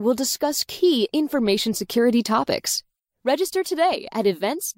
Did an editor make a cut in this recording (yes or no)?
no